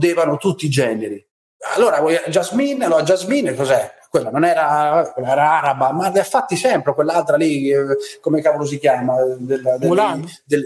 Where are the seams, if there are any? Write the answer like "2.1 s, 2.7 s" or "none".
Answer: none